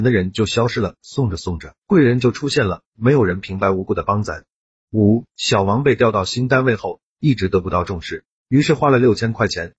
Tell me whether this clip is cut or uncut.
uncut